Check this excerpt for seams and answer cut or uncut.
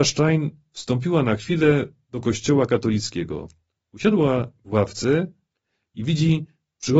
uncut